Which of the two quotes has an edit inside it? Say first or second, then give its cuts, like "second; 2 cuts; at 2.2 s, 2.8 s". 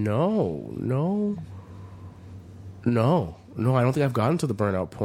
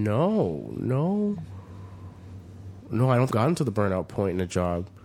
second; 2 cuts; at 2.8 s, 3.3 s